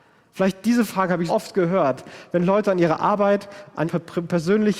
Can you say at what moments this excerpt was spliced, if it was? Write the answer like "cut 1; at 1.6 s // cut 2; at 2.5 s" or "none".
cut 1; at 1.3 s // cut 2; at 3.8 s